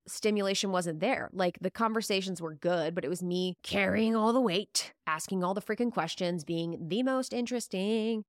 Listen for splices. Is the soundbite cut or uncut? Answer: cut